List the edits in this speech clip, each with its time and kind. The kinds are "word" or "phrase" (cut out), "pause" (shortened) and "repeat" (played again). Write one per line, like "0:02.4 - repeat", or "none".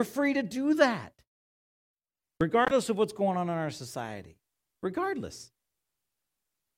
none